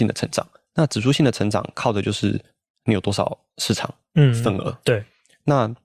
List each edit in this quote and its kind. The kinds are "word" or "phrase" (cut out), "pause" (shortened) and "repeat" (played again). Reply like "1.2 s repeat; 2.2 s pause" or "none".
none